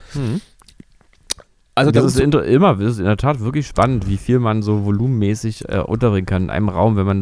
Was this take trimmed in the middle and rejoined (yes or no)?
no